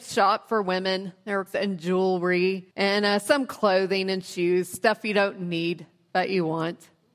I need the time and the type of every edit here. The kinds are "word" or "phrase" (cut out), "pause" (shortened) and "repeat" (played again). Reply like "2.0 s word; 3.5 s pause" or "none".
1.5 s word; 2.7 s pause